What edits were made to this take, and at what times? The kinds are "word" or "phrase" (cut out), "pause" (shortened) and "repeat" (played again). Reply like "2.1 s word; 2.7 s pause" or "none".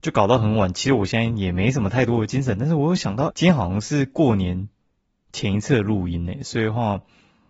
3.3 s word